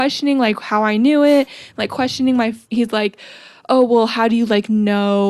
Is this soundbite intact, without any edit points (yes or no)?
yes